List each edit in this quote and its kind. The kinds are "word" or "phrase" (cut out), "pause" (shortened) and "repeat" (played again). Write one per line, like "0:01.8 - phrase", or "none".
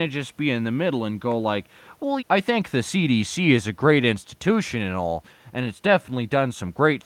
0:02.2 - word

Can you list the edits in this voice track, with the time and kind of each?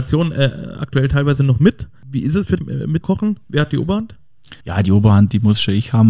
0:02.6 - word
0:03.0 - phrase
0:04.6 - pause

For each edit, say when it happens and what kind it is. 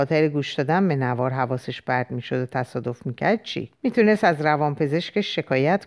0:03.7 - pause

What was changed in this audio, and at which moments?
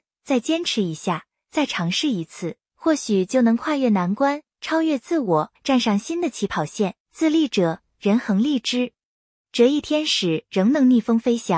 0:05.6 - pause
0:07.0 - pause

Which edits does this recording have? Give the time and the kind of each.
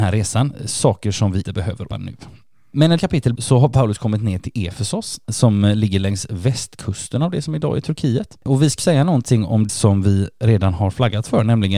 0:01.4 - word
0:01.9 - word
0:03.0 - word
0:03.3 - word
0:08.8 - word
0:09.7 - word

